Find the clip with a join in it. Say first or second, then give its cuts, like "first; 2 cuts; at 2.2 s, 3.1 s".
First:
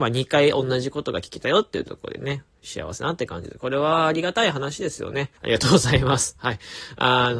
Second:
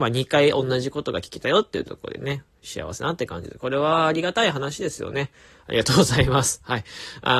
first; 1 cut; at 5.4 s